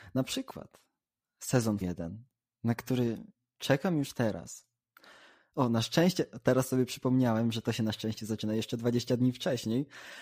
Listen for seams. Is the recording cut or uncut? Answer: cut